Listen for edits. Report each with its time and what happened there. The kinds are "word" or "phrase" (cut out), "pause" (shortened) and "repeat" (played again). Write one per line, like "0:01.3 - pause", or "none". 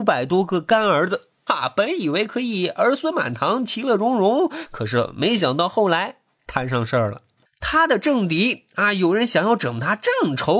0:01.5 - word